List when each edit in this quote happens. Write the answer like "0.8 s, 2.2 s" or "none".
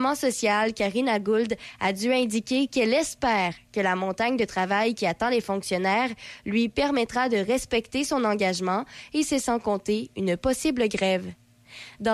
none